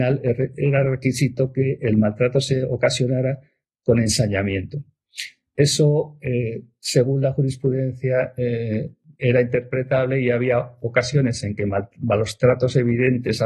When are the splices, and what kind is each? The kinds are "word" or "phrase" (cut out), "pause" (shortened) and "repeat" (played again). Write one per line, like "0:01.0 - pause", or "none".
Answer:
none